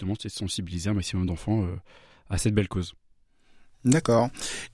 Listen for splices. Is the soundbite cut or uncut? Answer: uncut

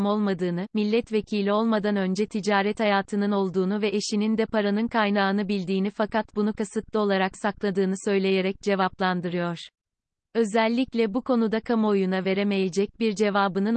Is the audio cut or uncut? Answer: uncut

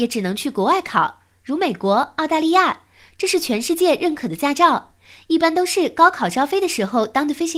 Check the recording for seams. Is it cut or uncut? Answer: uncut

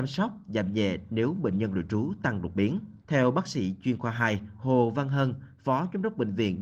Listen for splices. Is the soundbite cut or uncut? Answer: cut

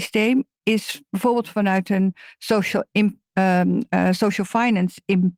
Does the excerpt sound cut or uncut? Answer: uncut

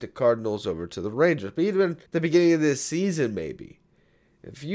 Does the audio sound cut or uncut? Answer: cut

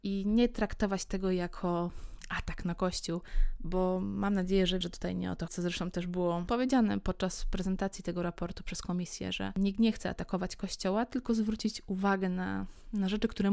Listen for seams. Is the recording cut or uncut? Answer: cut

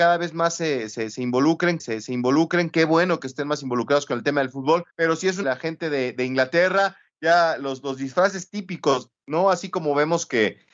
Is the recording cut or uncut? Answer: cut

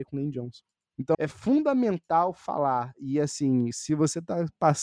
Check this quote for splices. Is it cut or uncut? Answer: cut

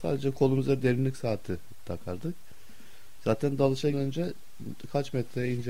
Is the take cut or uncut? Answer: cut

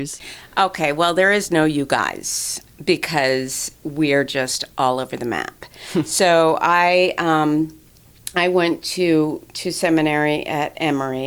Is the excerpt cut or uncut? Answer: uncut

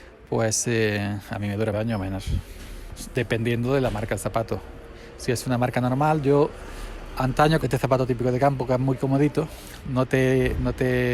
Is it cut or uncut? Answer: cut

